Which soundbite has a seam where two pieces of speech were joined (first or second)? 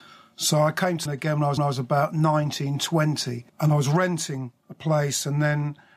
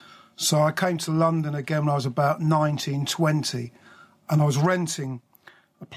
first